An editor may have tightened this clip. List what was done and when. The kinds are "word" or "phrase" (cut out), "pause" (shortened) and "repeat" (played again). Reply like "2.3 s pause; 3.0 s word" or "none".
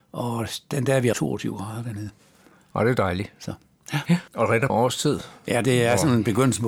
1.1 s phrase; 4.3 s pause; 4.7 s phrase